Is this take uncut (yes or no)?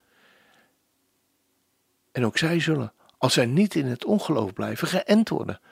yes